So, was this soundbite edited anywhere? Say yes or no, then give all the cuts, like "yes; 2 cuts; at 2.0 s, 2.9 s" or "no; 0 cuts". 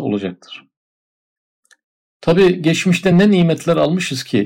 no; 0 cuts